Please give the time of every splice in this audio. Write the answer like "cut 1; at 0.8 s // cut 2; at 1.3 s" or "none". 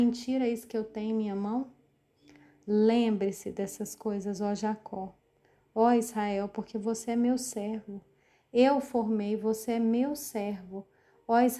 none